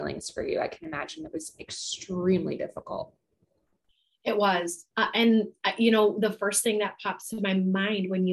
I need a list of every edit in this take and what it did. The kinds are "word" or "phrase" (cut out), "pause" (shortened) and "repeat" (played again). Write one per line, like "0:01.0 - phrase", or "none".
0:04.9 - pause

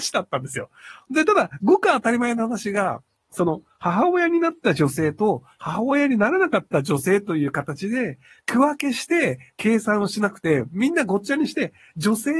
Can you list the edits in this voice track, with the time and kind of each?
none

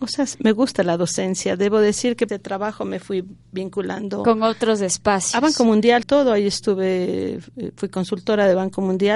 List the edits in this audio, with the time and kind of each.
0:02.3 - phrase
0:06.0 - word

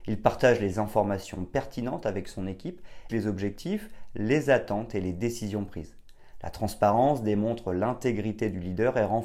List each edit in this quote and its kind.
0:03.1 - word

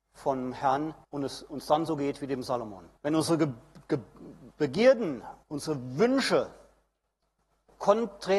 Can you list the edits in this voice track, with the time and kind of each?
0:01.0 - pause
0:03.0 - pause
0:05.4 - pause

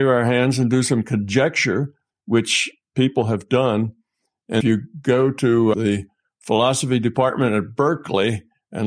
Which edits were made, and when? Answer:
0:04.6 - word
0:05.7 - word

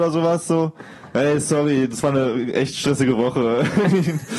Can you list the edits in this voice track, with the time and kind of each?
none

